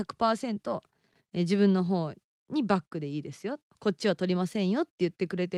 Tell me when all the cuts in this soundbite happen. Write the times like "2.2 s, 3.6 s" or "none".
none